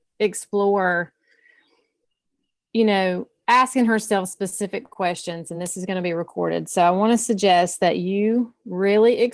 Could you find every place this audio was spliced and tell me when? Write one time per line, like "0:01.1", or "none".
none